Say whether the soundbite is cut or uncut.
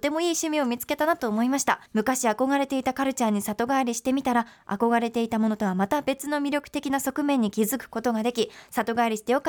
cut